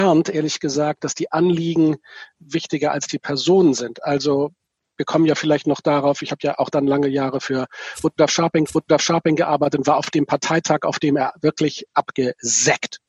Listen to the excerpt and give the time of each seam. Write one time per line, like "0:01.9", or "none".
0:08.7